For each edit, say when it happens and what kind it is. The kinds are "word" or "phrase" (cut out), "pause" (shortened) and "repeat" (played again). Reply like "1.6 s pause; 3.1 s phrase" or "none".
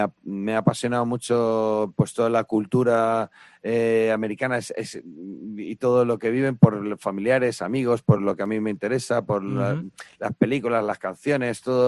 none